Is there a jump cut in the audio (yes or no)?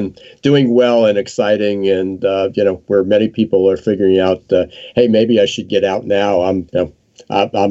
yes